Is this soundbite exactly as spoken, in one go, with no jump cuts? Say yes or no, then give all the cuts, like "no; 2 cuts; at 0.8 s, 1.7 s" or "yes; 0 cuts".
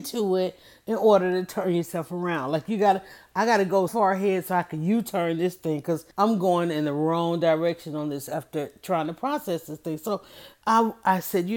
no; 2 cuts; at 3.9 s, 6.1 s